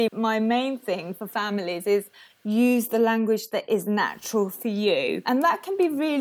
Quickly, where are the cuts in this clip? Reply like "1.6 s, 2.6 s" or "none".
none